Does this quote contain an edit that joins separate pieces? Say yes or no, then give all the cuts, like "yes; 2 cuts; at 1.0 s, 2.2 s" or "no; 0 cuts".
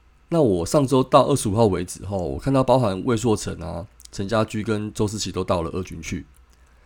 no; 0 cuts